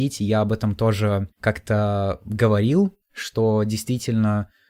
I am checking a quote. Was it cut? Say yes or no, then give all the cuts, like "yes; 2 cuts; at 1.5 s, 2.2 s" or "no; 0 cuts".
yes; 2 cuts; at 1.3 s, 3.0 s